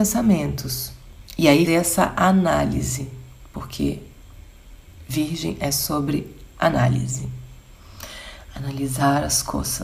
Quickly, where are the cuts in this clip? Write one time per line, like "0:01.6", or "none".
0:01.7